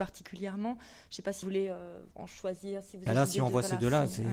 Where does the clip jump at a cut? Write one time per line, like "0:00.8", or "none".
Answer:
0:01.4
0:02.1
0:03.1